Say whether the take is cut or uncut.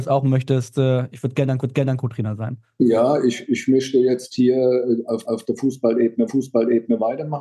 cut